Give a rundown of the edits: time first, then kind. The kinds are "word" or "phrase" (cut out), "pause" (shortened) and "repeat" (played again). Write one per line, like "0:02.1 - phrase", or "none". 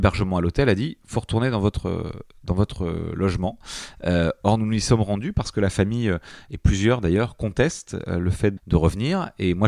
0:08.6 - word